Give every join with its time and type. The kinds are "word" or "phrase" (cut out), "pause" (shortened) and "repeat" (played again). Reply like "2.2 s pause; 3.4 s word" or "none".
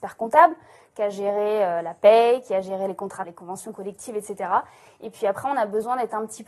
3.2 s phrase

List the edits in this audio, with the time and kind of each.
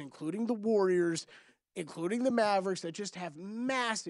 none

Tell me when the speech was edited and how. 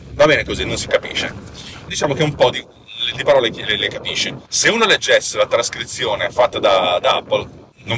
1.9 s phrase; 4.5 s pause

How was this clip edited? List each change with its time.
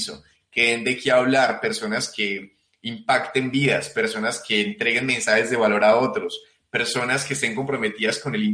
none

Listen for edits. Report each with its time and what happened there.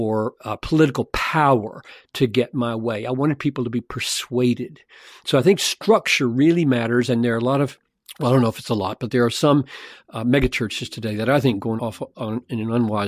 11.8 s word

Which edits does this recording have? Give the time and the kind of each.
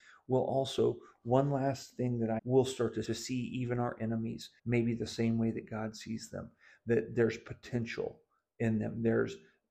2.4 s phrase; 3.0 s phrase; 4.6 s pause

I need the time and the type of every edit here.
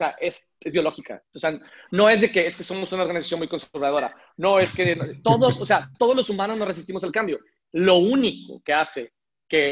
1.3 s pause; 5.9 s pause

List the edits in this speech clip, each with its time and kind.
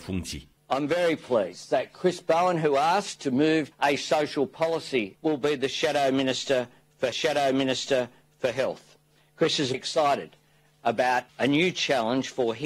3.7 s word; 5.1 s word; 7.1 s repeat; 9.7 s word; 11.3 s pause

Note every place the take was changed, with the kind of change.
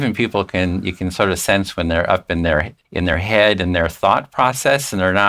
2.8 s pause

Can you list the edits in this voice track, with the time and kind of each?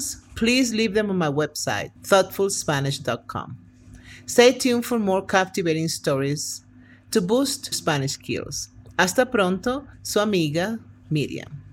2.0 s pause; 7.7 s word; 9.9 s pause

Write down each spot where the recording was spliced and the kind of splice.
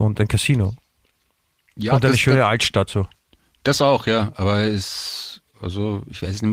2.9 s word; 5.5 s word

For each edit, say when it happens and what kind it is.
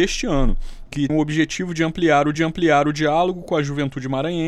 1.1 s word; 2.3 s repeat

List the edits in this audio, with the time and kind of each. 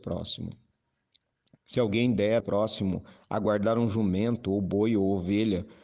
2.4 s phrase

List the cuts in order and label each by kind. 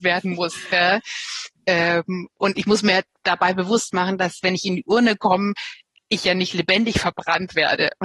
none

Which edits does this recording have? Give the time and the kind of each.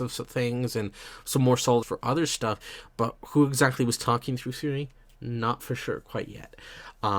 1.8 s word

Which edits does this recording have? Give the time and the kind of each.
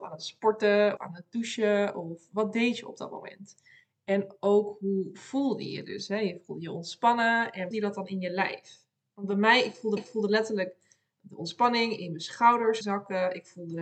1.0 s word; 7.7 s phrase; 10.0 s repeat; 12.8 s word

